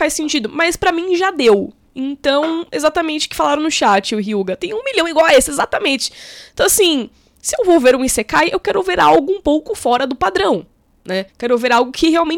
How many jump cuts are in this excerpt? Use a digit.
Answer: 1